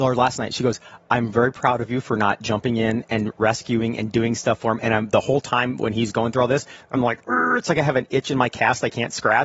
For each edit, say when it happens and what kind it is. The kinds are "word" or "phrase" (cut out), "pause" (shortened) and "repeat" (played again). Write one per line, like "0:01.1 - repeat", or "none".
none